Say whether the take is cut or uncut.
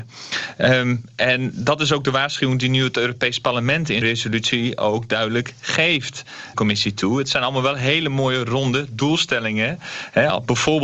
cut